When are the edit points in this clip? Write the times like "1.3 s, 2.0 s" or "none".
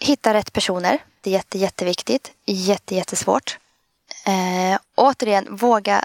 1.2 s, 2.9 s, 4.8 s